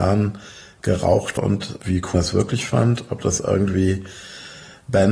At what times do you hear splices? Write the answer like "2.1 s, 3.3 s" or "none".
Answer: 1.4 s, 2.1 s, 3.4 s